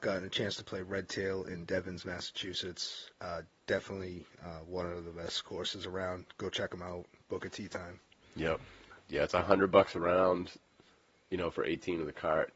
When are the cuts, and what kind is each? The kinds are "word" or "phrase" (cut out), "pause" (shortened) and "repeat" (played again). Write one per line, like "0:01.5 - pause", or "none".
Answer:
none